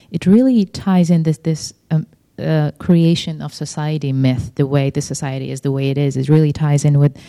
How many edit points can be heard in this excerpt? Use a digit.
0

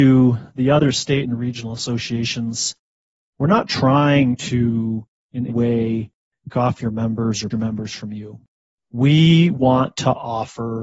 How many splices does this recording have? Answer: 3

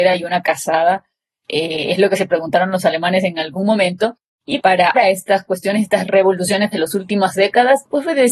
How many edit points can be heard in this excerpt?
2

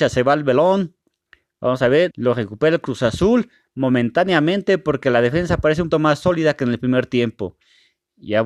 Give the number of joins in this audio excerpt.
2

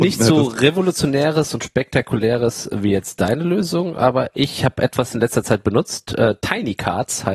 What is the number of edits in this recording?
0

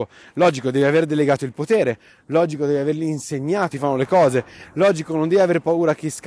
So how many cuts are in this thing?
1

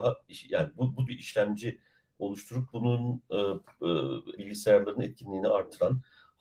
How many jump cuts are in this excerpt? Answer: 2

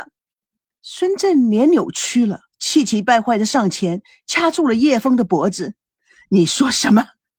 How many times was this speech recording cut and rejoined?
1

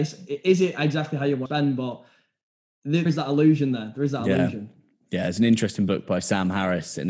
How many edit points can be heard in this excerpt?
2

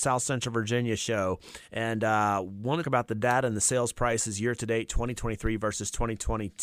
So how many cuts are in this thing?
2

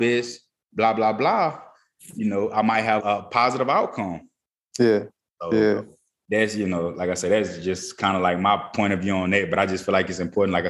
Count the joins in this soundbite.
1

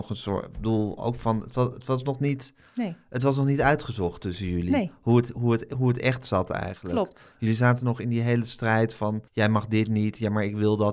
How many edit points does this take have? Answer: 1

